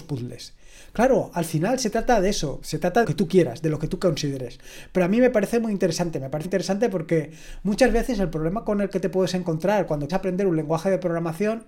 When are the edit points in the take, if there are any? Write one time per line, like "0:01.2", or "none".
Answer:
0:02.6
0:03.0
0:06.4
0:10.1

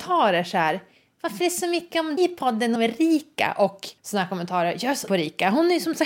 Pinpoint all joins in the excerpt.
0:01.4
0:02.2
0:02.8
0:04.0
0:05.1

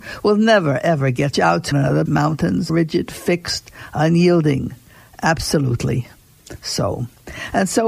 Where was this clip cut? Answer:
0:01.3
0:01.7
0:02.1
0:02.7

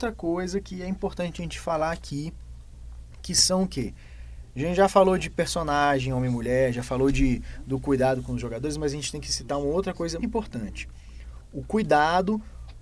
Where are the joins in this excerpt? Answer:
0:10.2

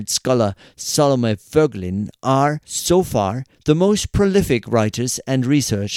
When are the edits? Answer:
0:02.6

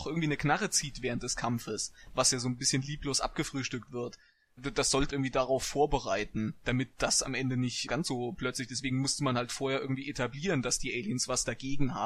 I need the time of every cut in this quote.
0:05.1
0:07.9

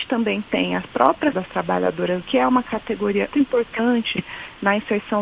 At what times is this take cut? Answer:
0:01.3
0:02.2
0:03.3

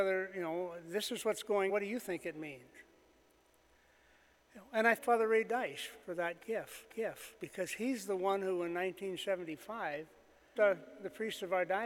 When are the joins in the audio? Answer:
0:01.7
0:05.0
0:06.0
0:06.9
0:10.6

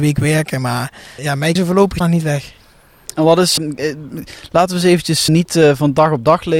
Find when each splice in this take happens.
0:01.2
0:01.6
0:02.0
0:03.6
0:05.3

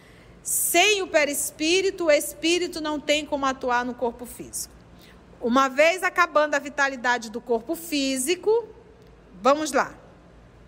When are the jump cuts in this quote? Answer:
none

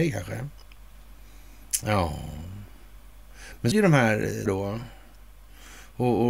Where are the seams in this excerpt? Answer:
0:03.7
0:04.5

